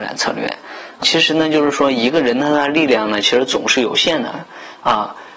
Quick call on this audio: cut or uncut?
cut